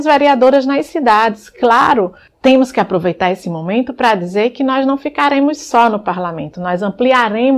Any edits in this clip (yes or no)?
no